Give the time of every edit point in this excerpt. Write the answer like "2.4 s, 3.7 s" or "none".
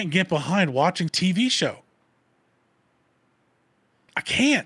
1.1 s